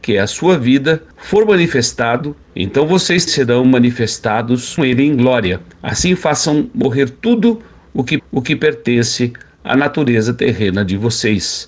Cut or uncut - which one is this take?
cut